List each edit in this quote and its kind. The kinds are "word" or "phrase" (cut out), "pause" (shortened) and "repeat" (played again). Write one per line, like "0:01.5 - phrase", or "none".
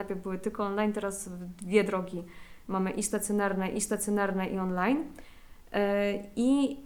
0:03.7 - repeat